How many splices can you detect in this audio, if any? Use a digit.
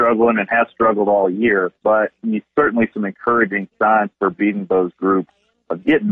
3